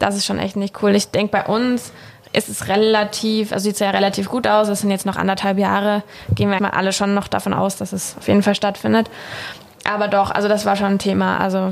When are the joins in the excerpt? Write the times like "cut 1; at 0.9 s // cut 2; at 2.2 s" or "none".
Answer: cut 1; at 6.6 s

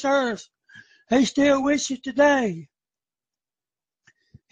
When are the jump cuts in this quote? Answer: none

